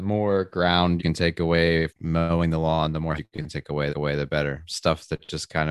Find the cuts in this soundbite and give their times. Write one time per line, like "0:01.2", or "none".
0:01.0
0:01.9
0:03.2
0:03.9